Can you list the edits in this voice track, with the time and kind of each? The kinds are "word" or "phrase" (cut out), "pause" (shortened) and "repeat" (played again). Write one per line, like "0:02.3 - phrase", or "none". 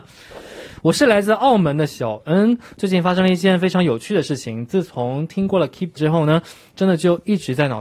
0:06.0 - word